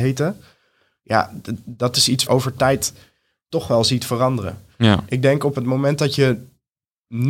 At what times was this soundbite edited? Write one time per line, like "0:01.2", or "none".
0:02.3